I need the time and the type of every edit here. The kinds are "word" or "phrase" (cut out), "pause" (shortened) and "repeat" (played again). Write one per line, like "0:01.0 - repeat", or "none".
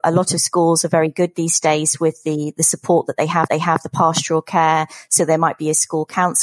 0:03.5 - repeat